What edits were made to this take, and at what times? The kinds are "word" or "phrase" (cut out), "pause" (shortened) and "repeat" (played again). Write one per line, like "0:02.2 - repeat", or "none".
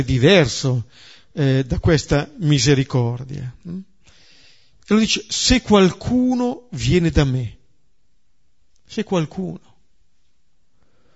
none